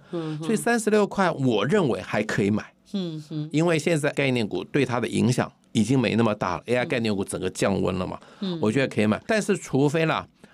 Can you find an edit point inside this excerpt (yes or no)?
yes